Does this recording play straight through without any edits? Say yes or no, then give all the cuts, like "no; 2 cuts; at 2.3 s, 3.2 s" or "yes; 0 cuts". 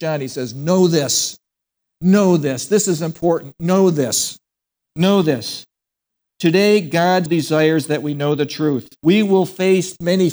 no; 2 cuts; at 7.3 s, 9.0 s